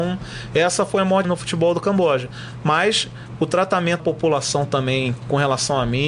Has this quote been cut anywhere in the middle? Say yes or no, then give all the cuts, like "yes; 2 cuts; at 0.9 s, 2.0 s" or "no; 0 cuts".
yes; 2 cuts; at 1.2 s, 4.0 s